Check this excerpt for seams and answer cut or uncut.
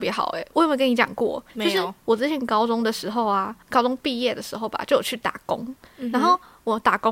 cut